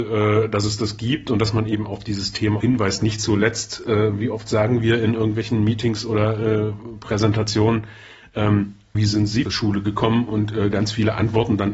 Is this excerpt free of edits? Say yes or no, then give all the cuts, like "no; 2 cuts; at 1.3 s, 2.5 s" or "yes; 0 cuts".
no; 3 cuts; at 2.6 s, 8.9 s, 9.4 s